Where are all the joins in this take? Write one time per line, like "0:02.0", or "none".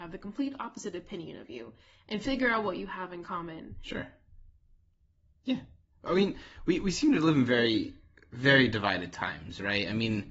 none